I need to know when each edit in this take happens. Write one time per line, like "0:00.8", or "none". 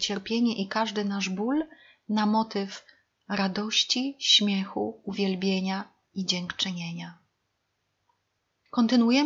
none